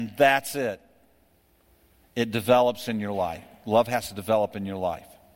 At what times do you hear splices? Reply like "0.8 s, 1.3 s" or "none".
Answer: none